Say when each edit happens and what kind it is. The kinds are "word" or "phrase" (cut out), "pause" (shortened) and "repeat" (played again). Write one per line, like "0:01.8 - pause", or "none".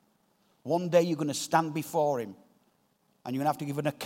none